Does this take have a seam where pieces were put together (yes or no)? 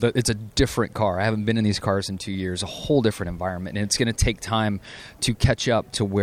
no